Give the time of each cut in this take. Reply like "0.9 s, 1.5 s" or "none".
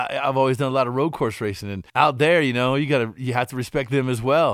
1.9 s